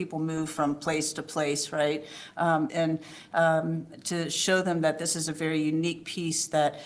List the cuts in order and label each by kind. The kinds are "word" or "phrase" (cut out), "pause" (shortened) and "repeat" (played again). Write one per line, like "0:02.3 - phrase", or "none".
0:02.7 - phrase